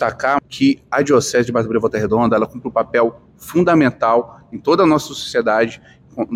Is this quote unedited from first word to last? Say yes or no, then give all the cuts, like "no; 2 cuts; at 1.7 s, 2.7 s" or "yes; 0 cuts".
yes; 0 cuts